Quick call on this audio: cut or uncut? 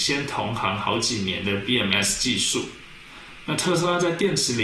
uncut